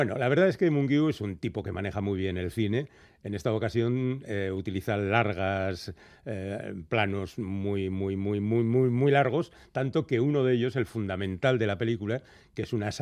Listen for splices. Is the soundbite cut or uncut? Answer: uncut